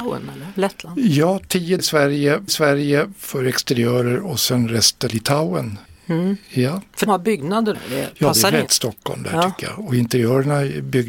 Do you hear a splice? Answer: yes; 7 cuts; at 1.8 s, 2.5 s, 5.1 s, 5.9 s, 7.1 s, 7.7 s, 8.7 s

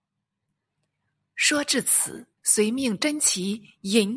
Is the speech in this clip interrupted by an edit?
yes; 1 cut; at 2.4 s

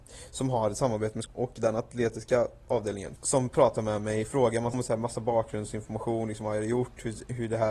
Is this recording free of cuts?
no; 3 cuts; at 1.3 s, 3.2 s, 4.7 s

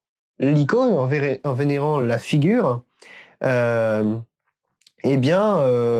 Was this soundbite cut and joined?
no; 0 cuts

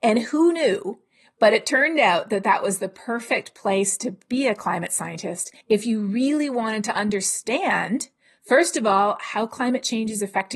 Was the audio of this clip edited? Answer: yes; 1 cut; at 5.6 s

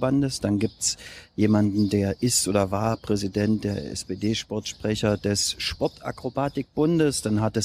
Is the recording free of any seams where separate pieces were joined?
yes; 0 cuts

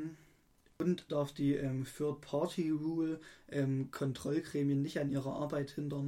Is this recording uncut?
no; 1 cut; at 1.1 s

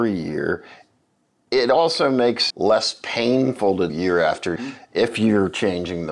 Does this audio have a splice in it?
yes; 3 cuts; at 2.5 s, 3.9 s, 4.6 s

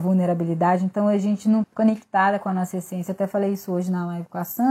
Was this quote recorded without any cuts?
no; 1 cut; at 1.6 s

